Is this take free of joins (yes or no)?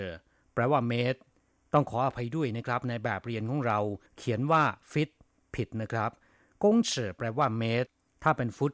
no